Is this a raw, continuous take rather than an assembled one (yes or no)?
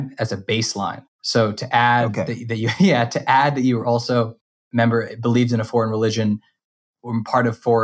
yes